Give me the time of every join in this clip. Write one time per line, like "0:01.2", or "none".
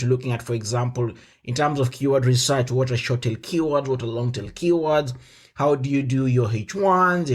none